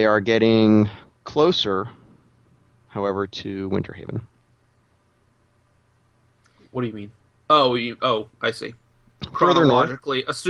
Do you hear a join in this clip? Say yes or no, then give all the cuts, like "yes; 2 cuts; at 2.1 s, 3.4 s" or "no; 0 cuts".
no; 0 cuts